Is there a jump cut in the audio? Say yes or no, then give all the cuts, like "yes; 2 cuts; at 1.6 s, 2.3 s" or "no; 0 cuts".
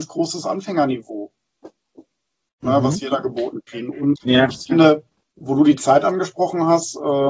yes; 2 cuts; at 4.2 s, 5.2 s